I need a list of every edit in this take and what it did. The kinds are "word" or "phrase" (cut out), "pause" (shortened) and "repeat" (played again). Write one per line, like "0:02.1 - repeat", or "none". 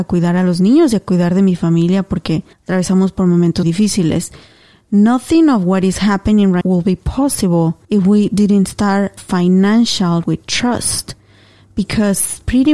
0:02.5 - pause
0:03.6 - word
0:06.6 - word
0:07.8 - pause
0:09.2 - word
0:10.2 - word